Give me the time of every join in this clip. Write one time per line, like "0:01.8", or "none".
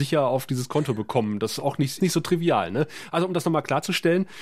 0:02.0